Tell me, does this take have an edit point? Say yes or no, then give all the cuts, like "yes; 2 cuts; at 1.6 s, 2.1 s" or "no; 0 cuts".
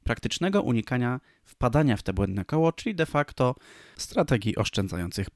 no; 0 cuts